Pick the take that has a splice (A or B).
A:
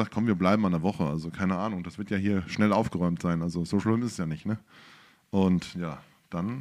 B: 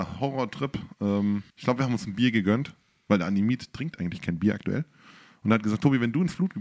B